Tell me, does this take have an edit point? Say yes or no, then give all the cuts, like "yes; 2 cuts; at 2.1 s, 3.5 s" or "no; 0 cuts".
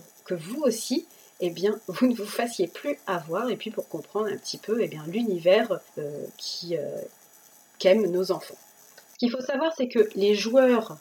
yes; 1 cut; at 5.9 s